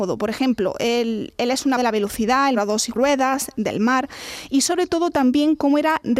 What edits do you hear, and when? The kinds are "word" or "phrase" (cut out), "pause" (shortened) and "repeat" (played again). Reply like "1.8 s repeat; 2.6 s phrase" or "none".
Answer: 1.8 s word; 2.5 s word; 2.9 s word